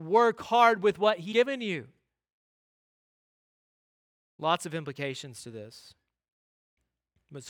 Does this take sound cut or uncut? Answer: cut